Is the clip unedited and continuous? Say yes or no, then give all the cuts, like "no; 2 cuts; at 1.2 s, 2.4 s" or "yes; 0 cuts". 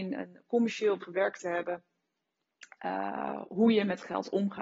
no; 1 cut; at 1.0 s